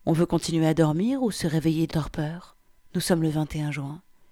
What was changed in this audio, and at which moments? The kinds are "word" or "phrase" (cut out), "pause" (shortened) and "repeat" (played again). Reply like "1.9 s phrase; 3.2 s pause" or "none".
1.9 s word; 2.8 s pause